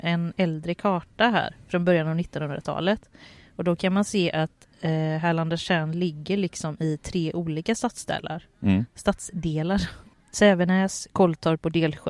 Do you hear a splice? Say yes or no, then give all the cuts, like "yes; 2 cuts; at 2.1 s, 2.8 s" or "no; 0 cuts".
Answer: no; 0 cuts